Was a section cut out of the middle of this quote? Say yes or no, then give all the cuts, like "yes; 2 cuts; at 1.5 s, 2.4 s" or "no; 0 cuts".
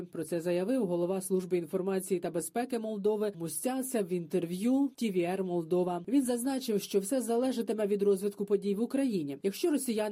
yes; 1 cut; at 3.3 s